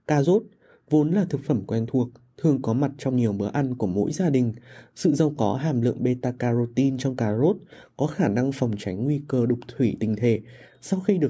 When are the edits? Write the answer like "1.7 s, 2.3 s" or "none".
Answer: none